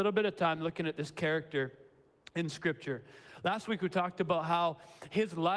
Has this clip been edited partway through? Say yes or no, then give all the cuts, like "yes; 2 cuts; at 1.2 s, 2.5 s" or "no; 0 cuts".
no; 0 cuts